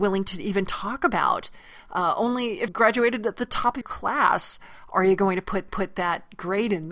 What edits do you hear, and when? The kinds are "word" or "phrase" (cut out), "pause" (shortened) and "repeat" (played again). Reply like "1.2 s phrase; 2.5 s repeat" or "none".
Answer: 2.7 s word; 3.8 s word; 5.7 s repeat